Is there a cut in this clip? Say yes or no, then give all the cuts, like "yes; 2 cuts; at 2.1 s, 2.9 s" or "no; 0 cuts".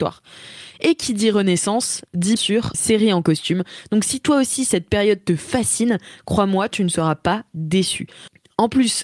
yes; 2 cuts; at 2.4 s, 2.7 s